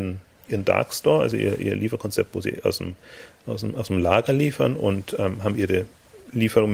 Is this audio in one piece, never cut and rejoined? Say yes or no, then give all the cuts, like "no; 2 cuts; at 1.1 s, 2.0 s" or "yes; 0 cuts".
yes; 0 cuts